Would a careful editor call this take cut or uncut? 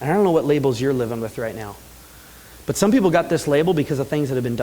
uncut